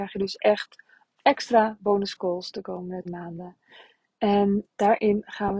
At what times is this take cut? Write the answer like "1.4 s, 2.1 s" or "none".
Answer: 1.2 s, 3.0 s, 4.7 s